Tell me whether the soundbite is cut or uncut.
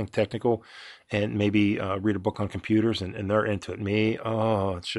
uncut